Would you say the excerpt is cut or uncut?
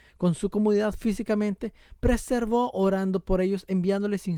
uncut